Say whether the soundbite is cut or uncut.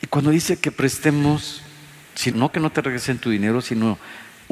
cut